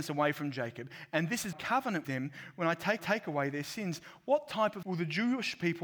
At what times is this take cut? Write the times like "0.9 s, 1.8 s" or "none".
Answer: 1.5 s, 2.0 s, 3.0 s, 4.8 s